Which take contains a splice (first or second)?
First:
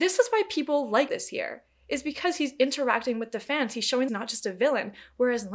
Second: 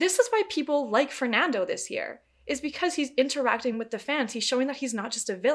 first